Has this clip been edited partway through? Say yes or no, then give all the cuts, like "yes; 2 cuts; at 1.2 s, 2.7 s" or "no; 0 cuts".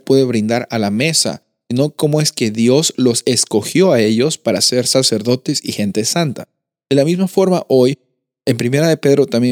no; 0 cuts